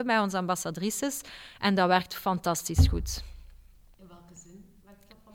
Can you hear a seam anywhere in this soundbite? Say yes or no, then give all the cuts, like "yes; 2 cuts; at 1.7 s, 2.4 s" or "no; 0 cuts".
no; 0 cuts